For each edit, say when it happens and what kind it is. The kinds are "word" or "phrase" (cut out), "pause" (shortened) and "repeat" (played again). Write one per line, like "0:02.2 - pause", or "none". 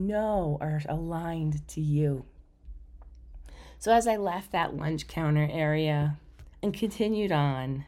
0:06.5 - pause